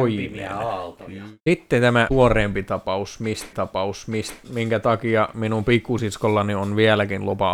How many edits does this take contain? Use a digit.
3